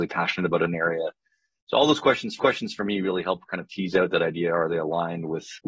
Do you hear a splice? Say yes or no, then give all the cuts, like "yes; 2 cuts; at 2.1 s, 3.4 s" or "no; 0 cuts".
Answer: yes; 1 cut; at 2.4 s